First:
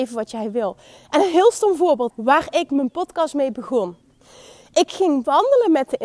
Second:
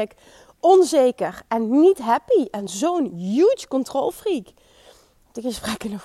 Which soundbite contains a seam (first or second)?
first